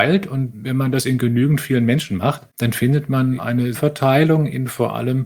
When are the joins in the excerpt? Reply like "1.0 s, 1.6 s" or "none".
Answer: 2.5 s, 3.4 s, 3.7 s